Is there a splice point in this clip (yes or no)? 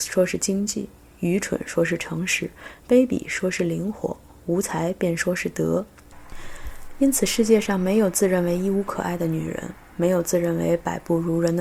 no